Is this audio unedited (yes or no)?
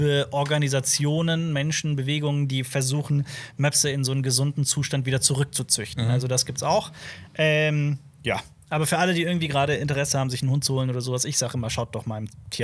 yes